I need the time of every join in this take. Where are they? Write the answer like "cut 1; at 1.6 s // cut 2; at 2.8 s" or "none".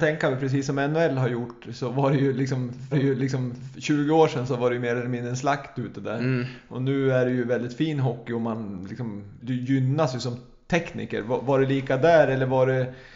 cut 1; at 2.9 s // cut 2; at 9.4 s